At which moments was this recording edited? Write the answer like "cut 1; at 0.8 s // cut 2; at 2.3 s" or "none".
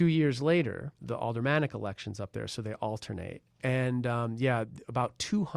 cut 1; at 0.9 s